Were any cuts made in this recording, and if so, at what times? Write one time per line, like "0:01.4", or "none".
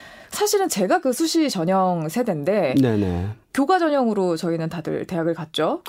0:03.4